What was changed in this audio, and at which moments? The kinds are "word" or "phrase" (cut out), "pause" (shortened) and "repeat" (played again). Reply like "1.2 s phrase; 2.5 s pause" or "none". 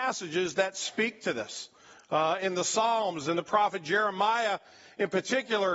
none